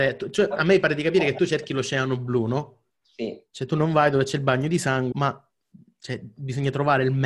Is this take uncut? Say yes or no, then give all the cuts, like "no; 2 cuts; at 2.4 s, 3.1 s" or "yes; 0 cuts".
no; 2 cuts; at 3.5 s, 5.1 s